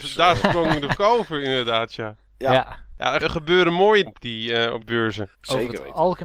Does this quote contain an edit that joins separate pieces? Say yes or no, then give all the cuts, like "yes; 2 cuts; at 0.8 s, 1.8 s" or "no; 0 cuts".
yes; 5 cuts; at 0.9 s, 3.2 s, 4.1 s, 4.8 s, 5.3 s